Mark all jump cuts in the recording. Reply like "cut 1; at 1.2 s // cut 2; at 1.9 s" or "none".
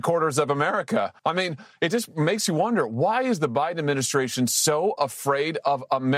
cut 1; at 1.2 s